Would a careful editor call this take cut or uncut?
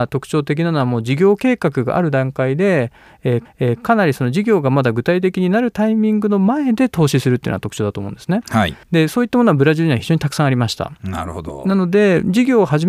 cut